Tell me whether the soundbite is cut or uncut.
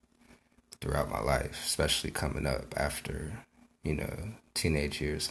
uncut